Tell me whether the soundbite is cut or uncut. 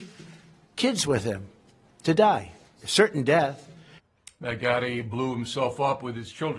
uncut